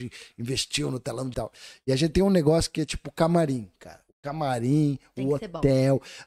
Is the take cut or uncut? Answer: cut